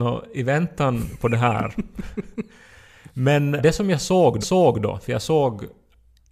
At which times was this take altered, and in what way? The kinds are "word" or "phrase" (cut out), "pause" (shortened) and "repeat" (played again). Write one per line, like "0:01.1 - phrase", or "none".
0:03.6 - word
0:04.4 - repeat